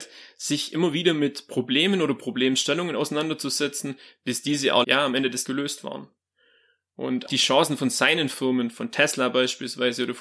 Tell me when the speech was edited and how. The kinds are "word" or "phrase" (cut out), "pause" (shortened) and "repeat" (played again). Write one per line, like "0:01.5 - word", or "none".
0:04.8 - word
0:05.4 - word
0:07.3 - word